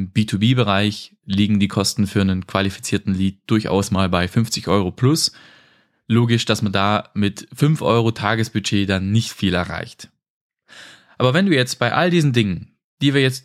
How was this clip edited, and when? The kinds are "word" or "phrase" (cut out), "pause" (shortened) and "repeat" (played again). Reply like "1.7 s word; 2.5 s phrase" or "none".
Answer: none